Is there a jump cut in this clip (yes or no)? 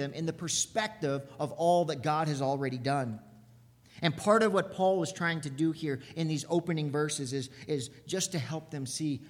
no